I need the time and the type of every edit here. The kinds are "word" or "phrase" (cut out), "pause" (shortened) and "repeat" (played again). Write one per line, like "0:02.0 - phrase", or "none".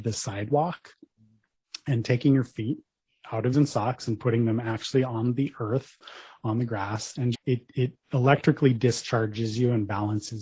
0:03.5 - phrase
0:07.3 - word